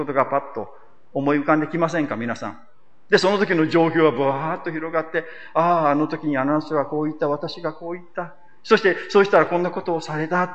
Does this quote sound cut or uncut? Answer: uncut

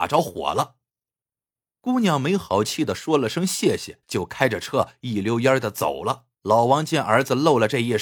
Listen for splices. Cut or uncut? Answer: cut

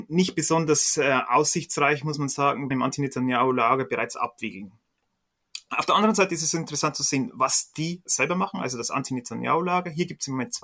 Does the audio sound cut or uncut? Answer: cut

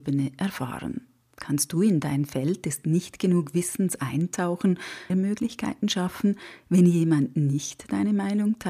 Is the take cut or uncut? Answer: cut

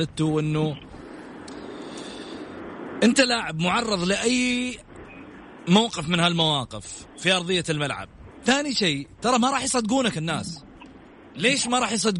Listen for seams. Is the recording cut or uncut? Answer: uncut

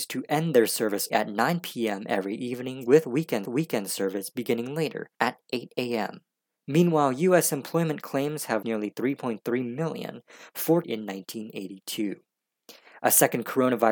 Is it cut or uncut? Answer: cut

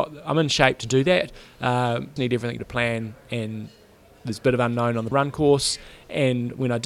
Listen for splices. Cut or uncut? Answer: cut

